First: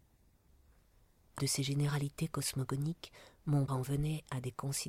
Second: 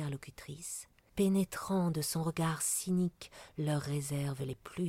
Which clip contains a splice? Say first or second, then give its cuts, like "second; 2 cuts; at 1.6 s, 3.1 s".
first; 2 cuts; at 1.4 s, 3.7 s